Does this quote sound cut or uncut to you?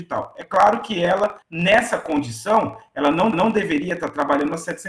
cut